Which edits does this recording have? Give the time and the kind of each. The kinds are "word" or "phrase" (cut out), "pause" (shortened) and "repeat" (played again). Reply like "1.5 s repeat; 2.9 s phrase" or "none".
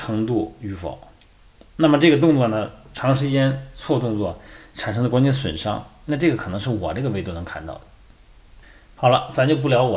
none